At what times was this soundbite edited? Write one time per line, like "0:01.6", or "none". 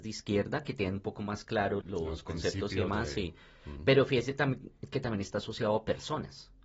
0:01.8

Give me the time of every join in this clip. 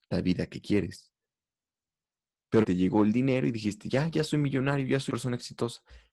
0:02.6
0:05.1

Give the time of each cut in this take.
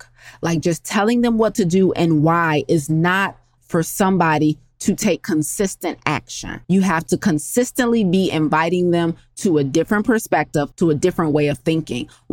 0:03.6
0:06.6
0:10.7

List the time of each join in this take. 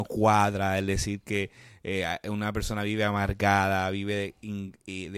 none

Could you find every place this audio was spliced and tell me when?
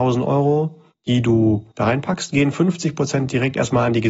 0:00.9
0:01.7

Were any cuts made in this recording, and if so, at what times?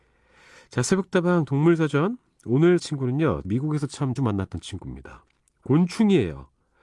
0:02.8
0:03.4
0:04.2

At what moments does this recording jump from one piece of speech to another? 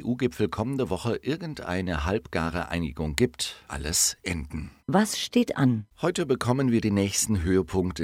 0:03.7
0:05.9

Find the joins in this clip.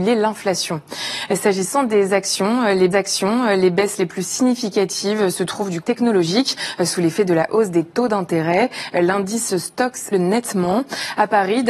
0:02.9
0:05.8
0:10.1

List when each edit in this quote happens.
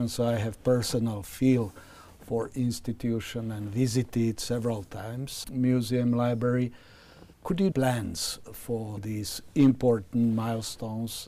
0:05.4
0:07.3
0:07.7
0:09.0

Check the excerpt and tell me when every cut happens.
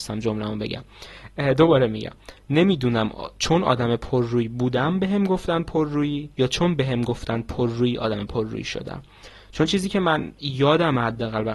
0:06.3

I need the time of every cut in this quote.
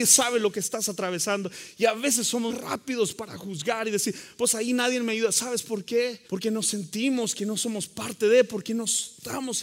0:02.5
0:06.3

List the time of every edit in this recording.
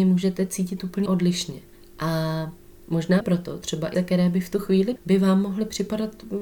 0:01.1
0:03.2
0:03.9
0:05.0

